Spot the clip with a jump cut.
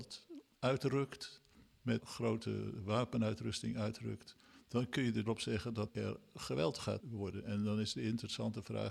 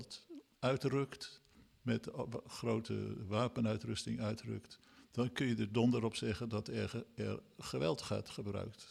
first; 4 cuts; at 2.0 s, 5.3 s, 5.9 s, 7.0 s

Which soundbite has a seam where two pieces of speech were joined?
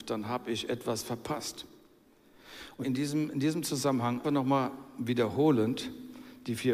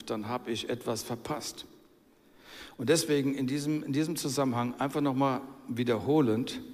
first; 2 cuts; at 2.8 s, 4.2 s

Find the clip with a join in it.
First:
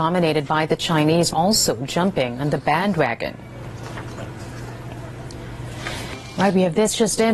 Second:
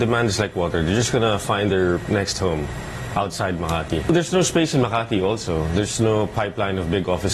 first; 1 cut; at 1.3 s

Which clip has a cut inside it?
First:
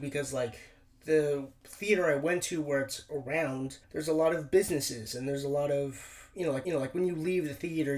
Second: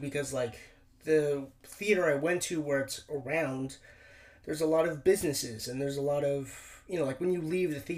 first; 2 cuts; at 3.8 s, 6.6 s

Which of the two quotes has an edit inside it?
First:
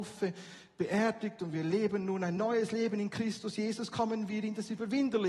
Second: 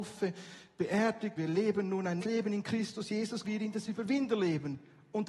second; 3 cuts; at 1.4 s, 2.2 s, 3.4 s

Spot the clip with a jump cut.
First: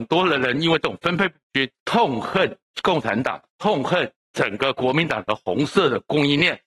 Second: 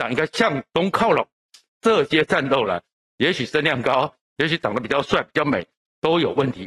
first; 2 cuts; at 1.8 s, 3.5 s

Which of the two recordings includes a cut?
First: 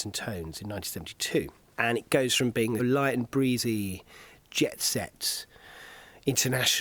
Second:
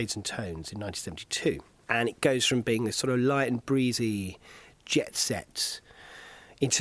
first; 1 cut; at 2.8 s

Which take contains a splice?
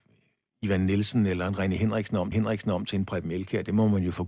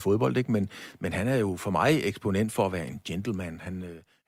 first; 1 cut; at 2.3 s

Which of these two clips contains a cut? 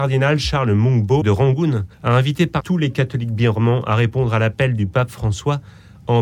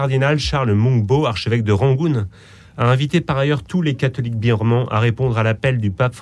first; 3 cuts; at 1.2 s, 1.9 s, 2.6 s

